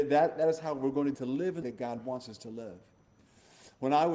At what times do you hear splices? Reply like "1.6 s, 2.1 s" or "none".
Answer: 1.1 s, 1.6 s